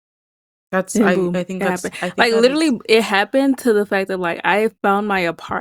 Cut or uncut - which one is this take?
uncut